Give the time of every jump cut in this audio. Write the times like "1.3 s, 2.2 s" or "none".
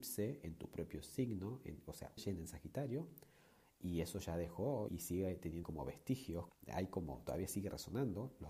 2.2 s, 4.9 s, 5.6 s, 6.5 s